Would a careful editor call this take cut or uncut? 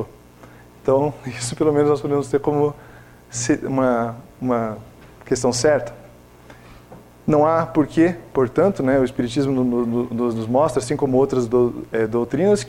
uncut